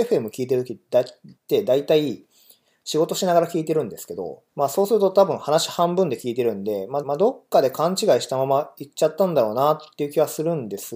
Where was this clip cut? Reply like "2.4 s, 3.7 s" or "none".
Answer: 1.4 s, 4.5 s, 7.0 s

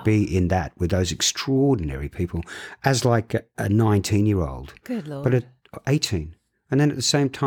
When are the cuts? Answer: 3.5 s

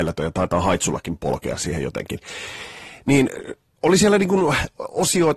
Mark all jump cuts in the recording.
none

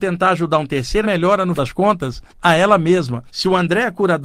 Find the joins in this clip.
1.0 s, 1.6 s, 2.3 s, 3.3 s

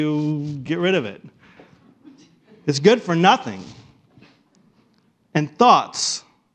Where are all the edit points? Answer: none

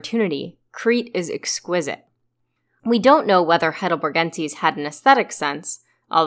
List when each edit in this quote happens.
none

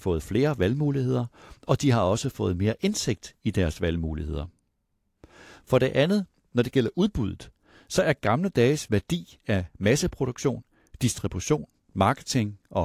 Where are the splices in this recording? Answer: none

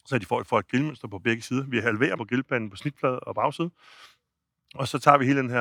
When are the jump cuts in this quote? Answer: 2.2 s

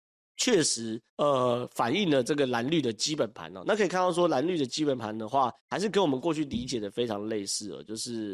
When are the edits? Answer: 1.1 s, 5.6 s

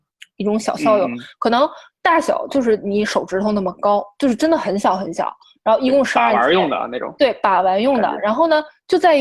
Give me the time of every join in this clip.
none

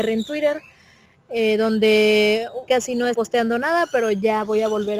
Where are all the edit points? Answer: 2.7 s, 3.1 s

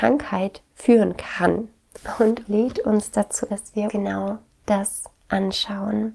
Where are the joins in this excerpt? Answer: 2.4 s, 3.5 s, 3.9 s

